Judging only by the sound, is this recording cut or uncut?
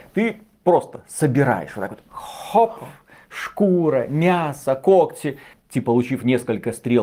cut